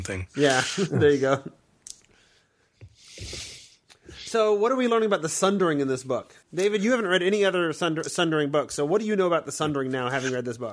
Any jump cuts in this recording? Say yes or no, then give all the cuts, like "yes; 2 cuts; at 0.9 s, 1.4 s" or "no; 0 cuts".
yes; 1 cut; at 6.4 s